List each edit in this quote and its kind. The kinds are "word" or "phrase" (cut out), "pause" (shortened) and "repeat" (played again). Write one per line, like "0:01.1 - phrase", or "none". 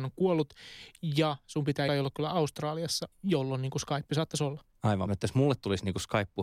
0:01.9 - word
0:05.1 - phrase